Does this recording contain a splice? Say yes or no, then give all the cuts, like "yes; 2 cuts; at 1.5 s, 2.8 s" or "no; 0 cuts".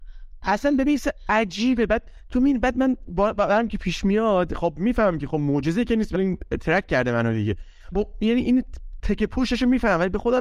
yes; 2 cuts; at 6.1 s, 7.9 s